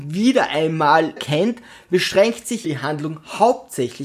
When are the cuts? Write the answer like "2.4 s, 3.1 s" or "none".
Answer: 1.2 s, 2.6 s